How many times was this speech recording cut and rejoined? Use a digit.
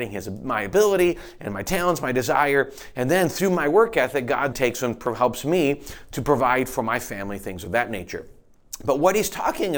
1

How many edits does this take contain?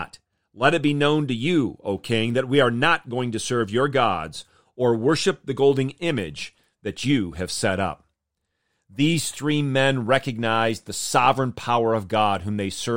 0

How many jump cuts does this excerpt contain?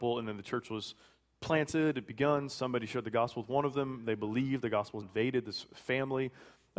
1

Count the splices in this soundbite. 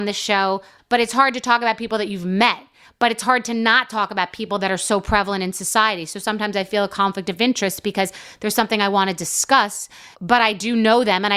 0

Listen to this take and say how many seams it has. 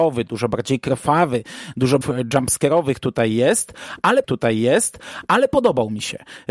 2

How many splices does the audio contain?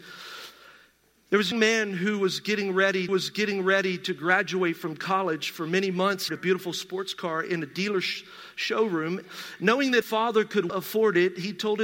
5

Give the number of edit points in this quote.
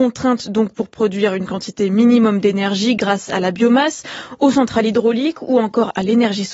0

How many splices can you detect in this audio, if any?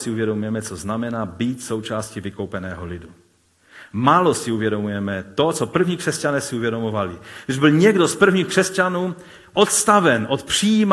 0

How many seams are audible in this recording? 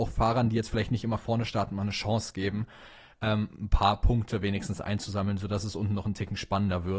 0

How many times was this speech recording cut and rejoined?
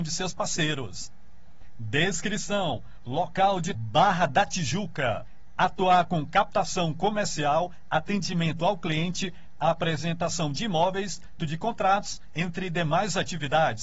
2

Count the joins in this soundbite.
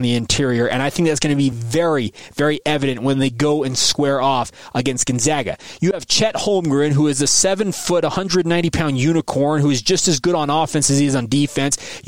0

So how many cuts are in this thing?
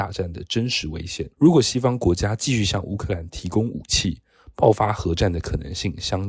1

